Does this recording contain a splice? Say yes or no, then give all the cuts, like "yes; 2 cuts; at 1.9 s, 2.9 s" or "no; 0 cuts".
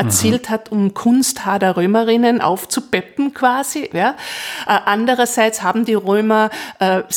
no; 0 cuts